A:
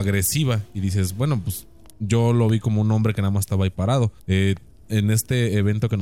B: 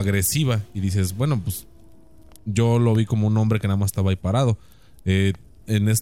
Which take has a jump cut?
A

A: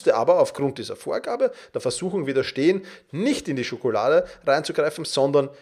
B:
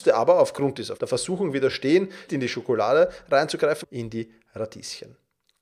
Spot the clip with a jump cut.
B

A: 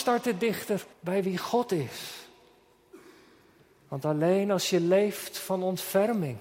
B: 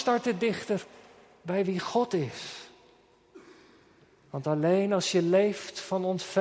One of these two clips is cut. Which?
A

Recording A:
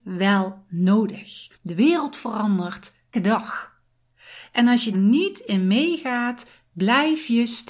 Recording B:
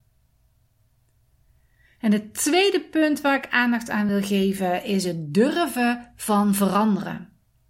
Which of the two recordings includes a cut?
A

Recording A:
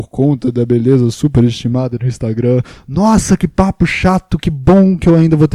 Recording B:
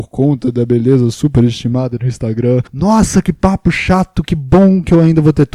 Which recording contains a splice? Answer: B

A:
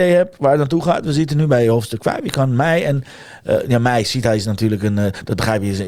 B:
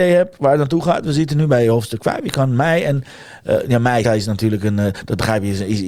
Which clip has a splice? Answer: B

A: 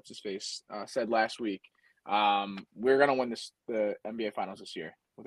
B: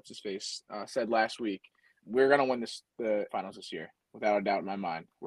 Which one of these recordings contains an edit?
B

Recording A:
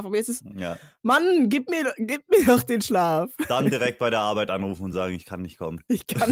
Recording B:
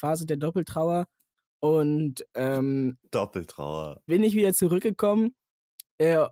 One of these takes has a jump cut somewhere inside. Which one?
B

